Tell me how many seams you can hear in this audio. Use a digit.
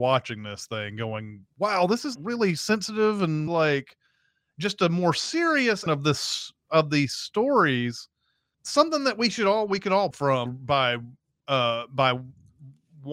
6